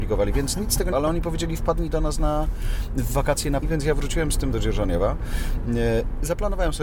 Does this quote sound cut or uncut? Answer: cut